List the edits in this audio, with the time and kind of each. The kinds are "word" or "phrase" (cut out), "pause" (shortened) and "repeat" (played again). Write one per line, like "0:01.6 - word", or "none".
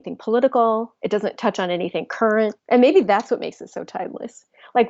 0:02.6 - pause